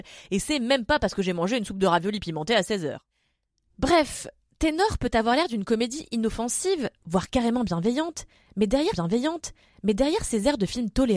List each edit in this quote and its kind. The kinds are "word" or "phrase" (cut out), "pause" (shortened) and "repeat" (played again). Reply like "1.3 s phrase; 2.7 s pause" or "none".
8.9 s repeat